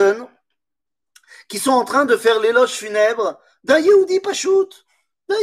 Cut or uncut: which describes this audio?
uncut